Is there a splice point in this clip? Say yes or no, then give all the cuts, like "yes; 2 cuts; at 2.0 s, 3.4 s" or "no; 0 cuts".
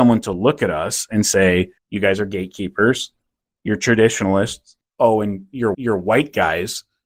yes; 3 cuts; at 1.8 s, 4.8 s, 5.7 s